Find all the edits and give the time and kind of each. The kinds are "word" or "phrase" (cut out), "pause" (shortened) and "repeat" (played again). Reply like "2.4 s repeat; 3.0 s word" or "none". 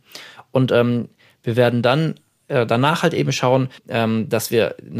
3.8 s pause